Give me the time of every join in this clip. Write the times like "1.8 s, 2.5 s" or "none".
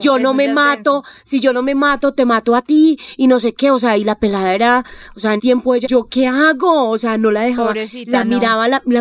5.4 s, 5.8 s